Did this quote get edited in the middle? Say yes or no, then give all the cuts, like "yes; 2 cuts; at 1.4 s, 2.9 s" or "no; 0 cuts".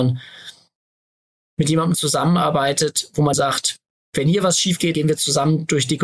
yes; 3 cuts; at 3.3 s, 3.9 s, 4.9 s